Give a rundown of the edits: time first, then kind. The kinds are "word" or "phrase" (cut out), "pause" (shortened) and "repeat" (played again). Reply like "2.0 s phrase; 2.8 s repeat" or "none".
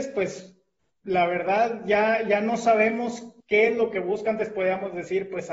3.4 s pause